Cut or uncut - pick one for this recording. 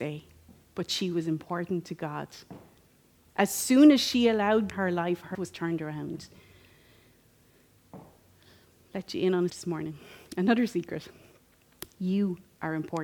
cut